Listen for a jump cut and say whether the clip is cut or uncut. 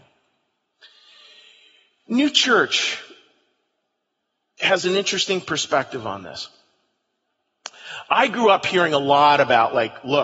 uncut